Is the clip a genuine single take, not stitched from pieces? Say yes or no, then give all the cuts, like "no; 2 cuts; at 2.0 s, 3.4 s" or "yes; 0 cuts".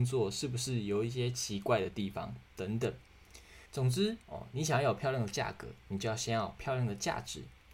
no; 2 cuts; at 3.7 s, 4.2 s